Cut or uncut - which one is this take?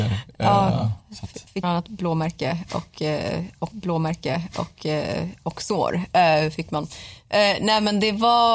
cut